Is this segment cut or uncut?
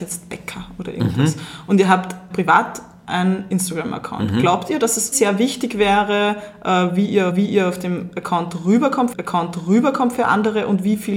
cut